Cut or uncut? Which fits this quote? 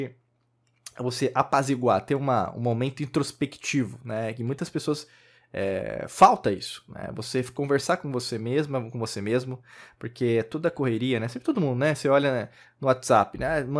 uncut